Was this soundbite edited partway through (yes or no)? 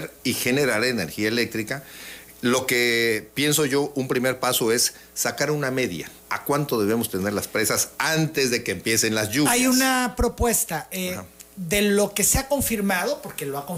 yes